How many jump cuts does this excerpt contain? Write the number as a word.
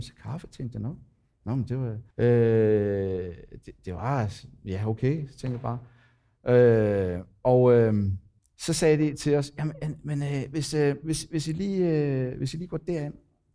two